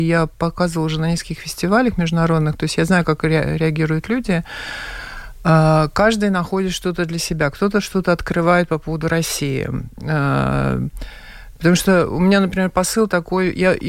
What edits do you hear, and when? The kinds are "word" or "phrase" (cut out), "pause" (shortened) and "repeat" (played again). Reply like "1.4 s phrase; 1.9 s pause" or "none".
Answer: none

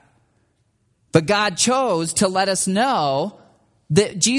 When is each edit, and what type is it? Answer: none

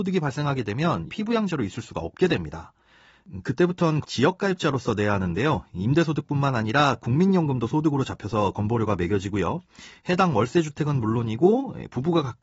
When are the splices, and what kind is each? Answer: 1.1 s word; 4.0 s word

